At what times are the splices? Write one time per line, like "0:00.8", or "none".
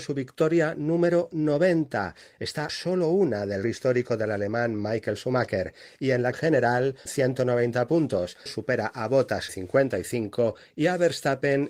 0:02.7
0:03.6
0:06.3
0:07.1
0:08.5
0:09.5